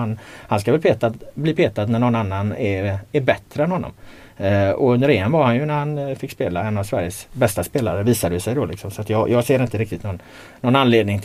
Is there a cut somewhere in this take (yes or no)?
no